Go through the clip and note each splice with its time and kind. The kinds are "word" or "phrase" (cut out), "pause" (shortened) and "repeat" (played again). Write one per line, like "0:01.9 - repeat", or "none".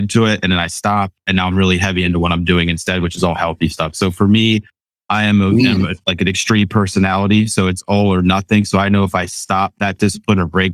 none